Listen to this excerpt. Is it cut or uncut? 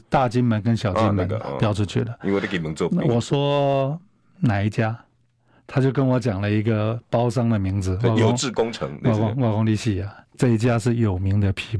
cut